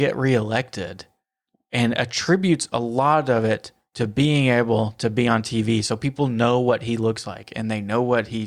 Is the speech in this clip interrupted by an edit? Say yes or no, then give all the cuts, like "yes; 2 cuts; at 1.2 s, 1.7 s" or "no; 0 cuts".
yes; 1 cut; at 1.5 s